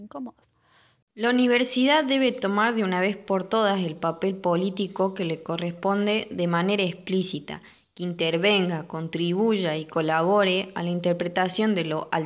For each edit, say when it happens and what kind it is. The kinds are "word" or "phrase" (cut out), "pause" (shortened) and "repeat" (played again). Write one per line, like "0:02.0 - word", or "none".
none

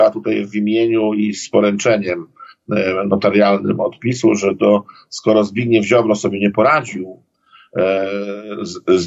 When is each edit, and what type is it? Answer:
none

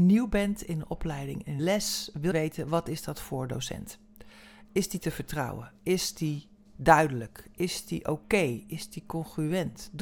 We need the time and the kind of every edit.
0:01.6 - word
0:02.3 - word

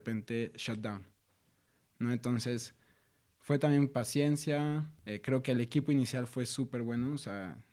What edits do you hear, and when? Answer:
none

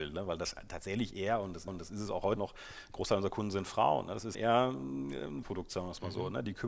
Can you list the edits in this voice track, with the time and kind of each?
0:01.7 - repeat
0:02.4 - word
0:04.3 - word
0:05.4 - word

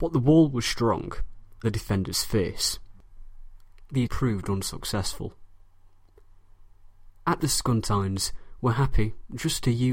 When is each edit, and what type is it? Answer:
0:01.6 - word
0:04.1 - word
0:07.4 - word

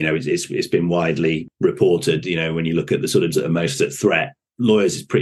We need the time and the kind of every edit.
0:03.3 - word

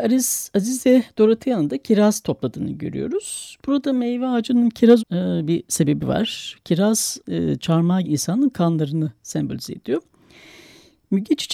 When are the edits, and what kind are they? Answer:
0:05.0 - word
0:07.2 - word
0:08.0 - word

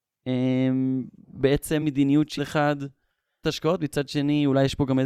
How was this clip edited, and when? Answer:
0:01.8 - word
0:02.4 - word
0:03.4 - word

